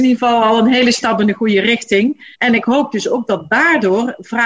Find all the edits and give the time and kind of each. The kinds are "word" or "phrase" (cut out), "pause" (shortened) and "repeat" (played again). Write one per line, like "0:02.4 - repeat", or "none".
0:02.3 - pause